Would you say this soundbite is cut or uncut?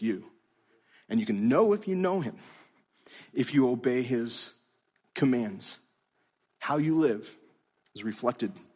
uncut